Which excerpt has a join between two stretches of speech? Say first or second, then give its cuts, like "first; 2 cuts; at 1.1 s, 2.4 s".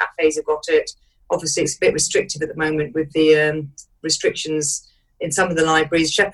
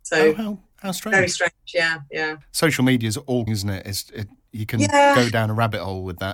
second; 1 cut; at 3.5 s